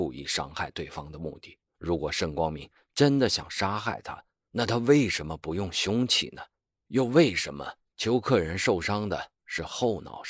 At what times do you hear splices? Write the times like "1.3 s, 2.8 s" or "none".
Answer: 1.7 s